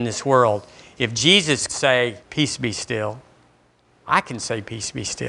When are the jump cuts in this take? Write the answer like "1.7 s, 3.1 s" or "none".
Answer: 1.7 s, 2.2 s